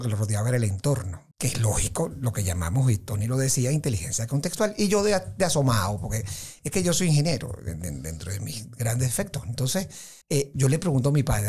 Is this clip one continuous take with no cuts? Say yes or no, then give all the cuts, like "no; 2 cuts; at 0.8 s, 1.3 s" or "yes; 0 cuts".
no; 2 cuts; at 1.3 s, 10.2 s